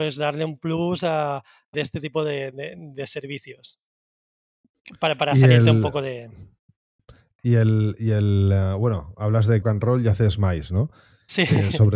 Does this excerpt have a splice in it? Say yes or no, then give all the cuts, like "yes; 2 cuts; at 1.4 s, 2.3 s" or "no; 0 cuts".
yes; 2 cuts; at 1.7 s, 9.6 s